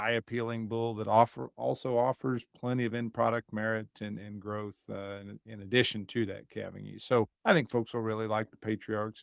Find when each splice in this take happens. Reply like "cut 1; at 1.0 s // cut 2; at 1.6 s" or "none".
cut 1; at 7.3 s